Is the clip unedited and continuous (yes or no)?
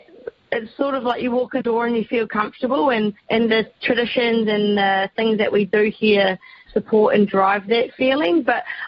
no